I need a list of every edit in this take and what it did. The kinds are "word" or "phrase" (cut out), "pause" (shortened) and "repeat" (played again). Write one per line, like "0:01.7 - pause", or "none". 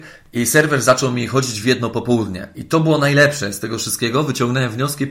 none

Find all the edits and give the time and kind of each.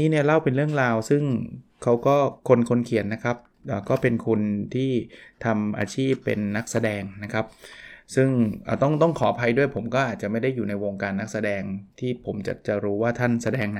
0:02.4 - pause

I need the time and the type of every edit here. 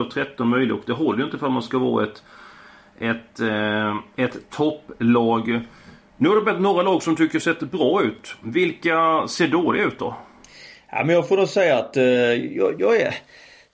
none

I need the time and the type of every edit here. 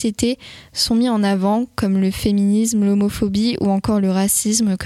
none

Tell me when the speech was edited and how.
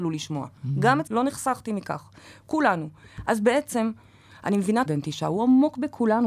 0:01.1 - word
0:04.9 - word

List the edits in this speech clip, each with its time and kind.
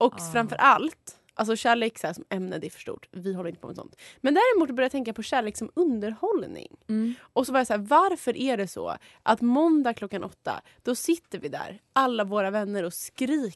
none

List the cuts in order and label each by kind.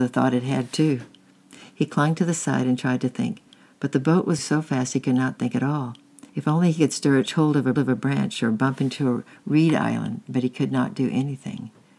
0:04.4 - word
0:06.3 - pause
0:07.3 - phrase
0:07.8 - repeat

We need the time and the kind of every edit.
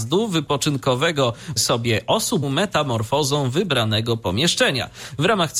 0:01.6 - word
0:02.4 - phrase

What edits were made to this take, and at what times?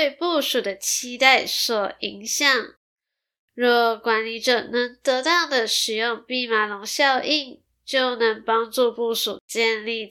none

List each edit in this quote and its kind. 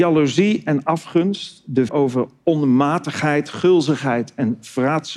0:01.9 - word

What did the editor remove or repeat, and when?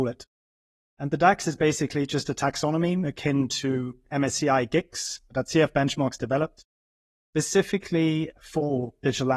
none

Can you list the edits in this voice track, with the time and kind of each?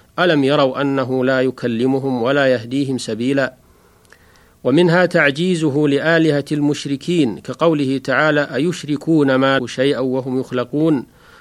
0:09.6 - phrase

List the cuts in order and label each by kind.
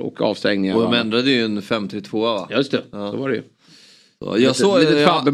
none

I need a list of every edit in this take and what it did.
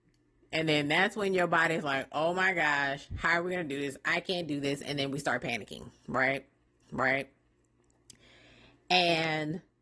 0:06.8 - repeat

